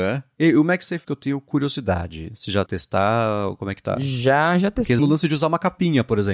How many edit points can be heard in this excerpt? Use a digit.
3